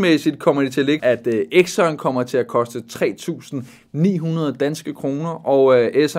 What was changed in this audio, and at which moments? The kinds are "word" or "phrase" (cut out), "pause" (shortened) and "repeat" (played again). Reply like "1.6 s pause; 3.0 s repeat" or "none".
1.0 s word